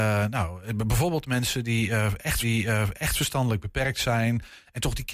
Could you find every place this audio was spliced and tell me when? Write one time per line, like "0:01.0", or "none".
0:02.4